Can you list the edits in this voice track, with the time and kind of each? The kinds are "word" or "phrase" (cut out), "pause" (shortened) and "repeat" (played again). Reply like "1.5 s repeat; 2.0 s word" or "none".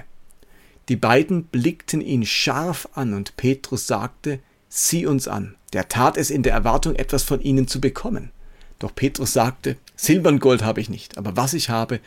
5.6 s pause; 9.9 s pause